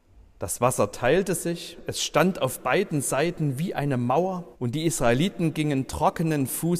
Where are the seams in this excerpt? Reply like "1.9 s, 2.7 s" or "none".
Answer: 4.5 s